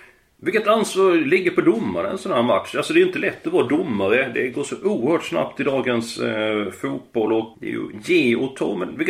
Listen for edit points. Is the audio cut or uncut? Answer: cut